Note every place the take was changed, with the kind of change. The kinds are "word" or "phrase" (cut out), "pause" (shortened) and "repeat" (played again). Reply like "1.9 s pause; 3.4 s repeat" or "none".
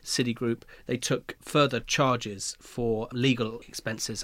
none